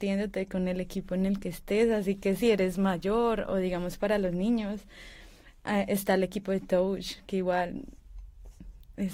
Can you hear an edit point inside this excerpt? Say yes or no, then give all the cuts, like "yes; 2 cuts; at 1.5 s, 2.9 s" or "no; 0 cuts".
no; 0 cuts